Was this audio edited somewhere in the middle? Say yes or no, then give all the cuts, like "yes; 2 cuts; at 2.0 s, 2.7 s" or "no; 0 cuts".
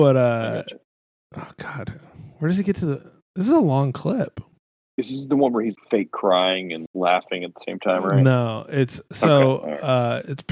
yes; 2 cuts; at 5.7 s, 6.9 s